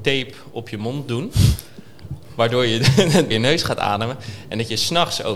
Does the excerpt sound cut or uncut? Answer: cut